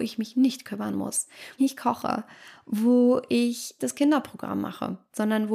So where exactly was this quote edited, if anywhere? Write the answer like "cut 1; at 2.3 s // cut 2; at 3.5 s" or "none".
cut 1; at 1.6 s // cut 2; at 3.8 s